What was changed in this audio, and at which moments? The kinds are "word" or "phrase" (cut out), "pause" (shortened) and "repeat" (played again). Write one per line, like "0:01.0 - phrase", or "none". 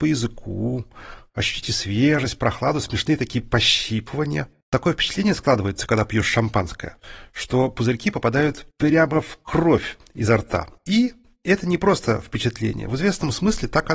0:04.6 - pause
0:08.7 - pause